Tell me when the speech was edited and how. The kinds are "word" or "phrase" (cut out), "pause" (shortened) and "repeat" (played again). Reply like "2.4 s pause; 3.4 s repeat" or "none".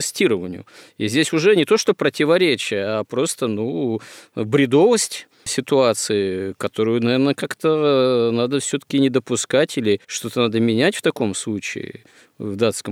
5.3 s pause; 10.0 s pause